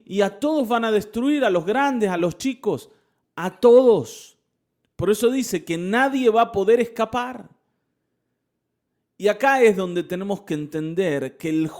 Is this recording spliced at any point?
no; 0 cuts

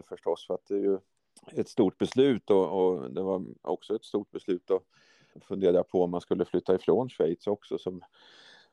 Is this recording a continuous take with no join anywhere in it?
no; 2 cuts; at 1.2 s, 5.3 s

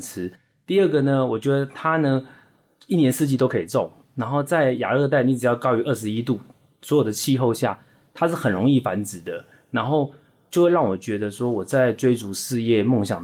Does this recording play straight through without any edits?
yes; 0 cuts

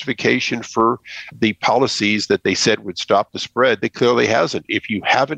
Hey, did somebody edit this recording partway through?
no; 0 cuts

